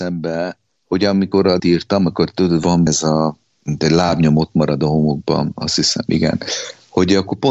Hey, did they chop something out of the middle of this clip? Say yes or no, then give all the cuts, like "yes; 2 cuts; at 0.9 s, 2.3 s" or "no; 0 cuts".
yes; 2 cuts; at 1.6 s, 2.9 s